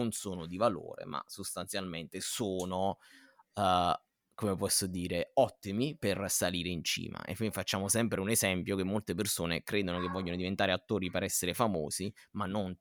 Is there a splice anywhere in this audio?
no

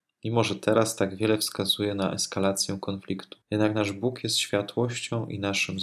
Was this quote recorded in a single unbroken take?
no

